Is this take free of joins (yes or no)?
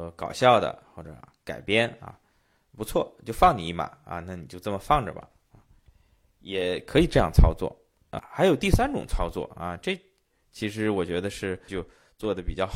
no